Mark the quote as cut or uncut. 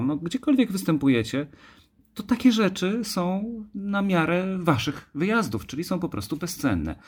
uncut